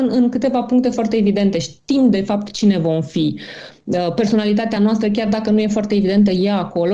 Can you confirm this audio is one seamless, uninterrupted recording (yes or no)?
yes